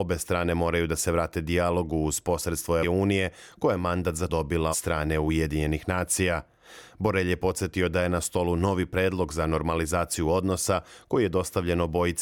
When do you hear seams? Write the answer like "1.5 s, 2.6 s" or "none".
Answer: 2.8 s, 4.3 s, 4.7 s

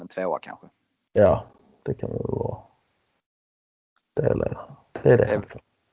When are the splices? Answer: 4.4 s

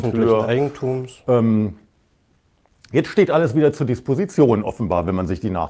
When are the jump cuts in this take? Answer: none

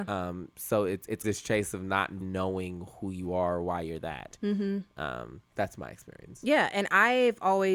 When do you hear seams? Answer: 1.2 s, 2.2 s

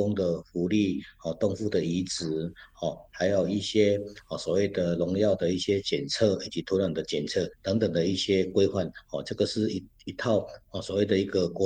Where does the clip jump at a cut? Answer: 7.5 s

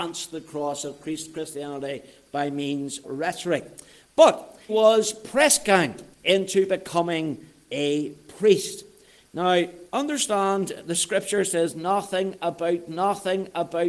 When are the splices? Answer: 3.0 s, 4.7 s, 6.1 s, 9.9 s, 12.9 s

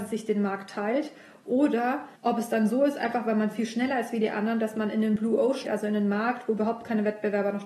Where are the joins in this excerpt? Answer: 2.2 s, 5.6 s

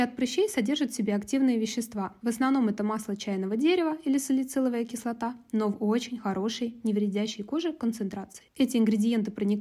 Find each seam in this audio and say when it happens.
none

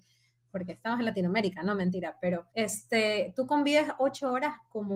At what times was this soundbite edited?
2.5 s

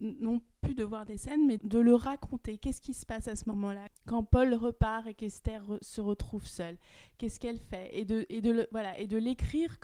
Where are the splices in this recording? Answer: 1.6 s

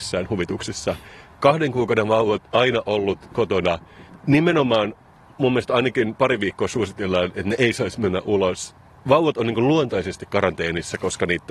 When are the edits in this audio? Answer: 2.5 s

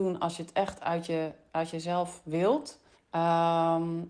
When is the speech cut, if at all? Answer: 2.9 s

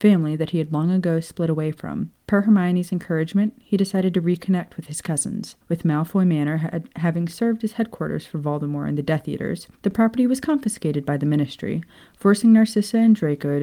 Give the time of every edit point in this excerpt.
2.2 s, 5.6 s, 9.7 s

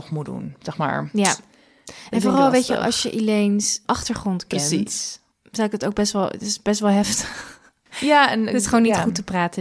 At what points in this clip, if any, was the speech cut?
none

